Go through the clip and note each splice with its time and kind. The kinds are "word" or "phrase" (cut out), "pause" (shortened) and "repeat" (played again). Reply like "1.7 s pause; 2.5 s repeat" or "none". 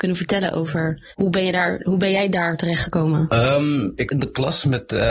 1.1 s pause; 4.1 s word